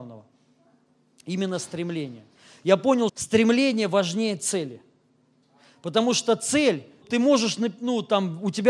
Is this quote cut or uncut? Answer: cut